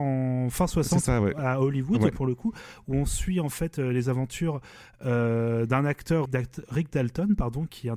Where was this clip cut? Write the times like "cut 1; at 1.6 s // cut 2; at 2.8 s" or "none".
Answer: cut 1; at 6.3 s